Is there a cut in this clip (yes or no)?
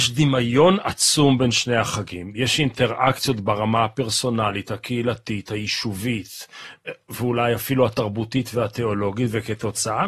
no